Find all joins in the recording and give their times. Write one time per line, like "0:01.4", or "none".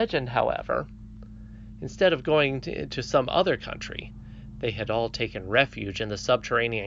none